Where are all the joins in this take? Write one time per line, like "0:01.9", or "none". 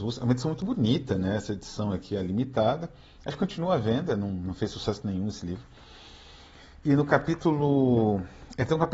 none